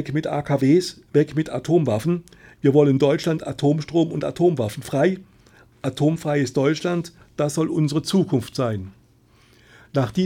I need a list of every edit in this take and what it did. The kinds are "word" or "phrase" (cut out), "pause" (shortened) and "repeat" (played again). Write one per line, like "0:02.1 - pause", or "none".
none